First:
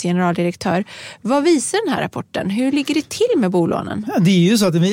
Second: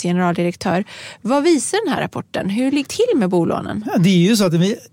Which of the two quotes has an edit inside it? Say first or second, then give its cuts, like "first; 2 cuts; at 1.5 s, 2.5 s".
second; 1 cut; at 2.9 s